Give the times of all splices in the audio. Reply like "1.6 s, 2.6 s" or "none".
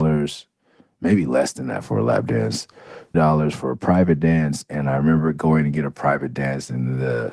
3.1 s